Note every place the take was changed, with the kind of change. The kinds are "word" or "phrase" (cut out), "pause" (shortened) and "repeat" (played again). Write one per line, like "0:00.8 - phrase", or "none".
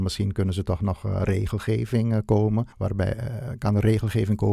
0:02.7 - pause